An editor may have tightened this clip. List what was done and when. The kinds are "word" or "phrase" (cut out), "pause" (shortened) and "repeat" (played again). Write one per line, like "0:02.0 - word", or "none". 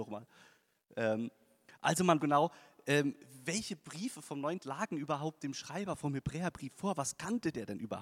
0:02.2 - phrase
0:04.6 - word